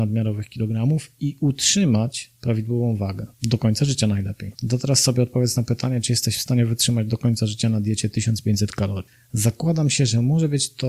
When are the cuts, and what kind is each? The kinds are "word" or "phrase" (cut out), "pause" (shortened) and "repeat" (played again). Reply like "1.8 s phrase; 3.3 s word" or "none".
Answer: 3.3 s pause; 4.5 s pause

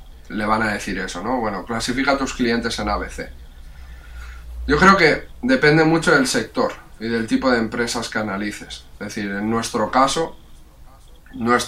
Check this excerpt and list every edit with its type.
none

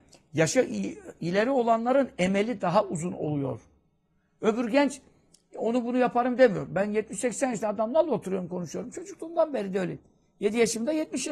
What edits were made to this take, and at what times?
none

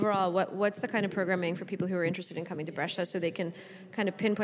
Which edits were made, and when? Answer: none

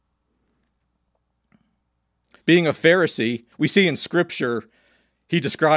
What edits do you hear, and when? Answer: 3.5 s pause

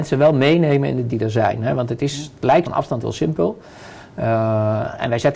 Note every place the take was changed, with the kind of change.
1.1 s word; 2.6 s word; 3.0 s word

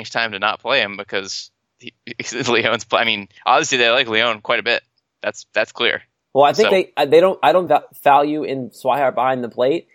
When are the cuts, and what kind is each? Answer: 6.7 s word; 7.7 s phrase

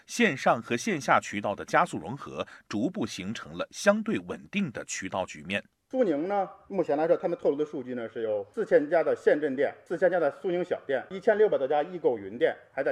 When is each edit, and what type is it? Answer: none

